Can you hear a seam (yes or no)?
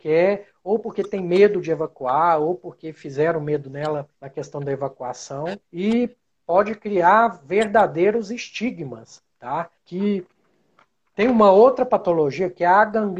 yes